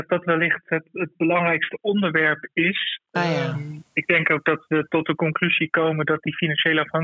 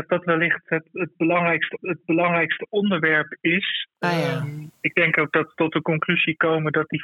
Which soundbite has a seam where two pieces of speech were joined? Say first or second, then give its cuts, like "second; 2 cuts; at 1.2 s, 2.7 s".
second; 2 cuts; at 1.8 s, 5.5 s